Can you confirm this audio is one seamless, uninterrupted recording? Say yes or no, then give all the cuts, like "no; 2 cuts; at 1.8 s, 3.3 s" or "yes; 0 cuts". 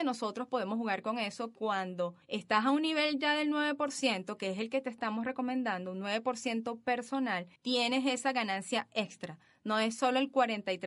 no; 2 cuts; at 2.2 s, 7.6 s